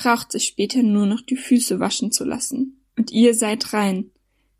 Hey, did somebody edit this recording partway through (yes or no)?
yes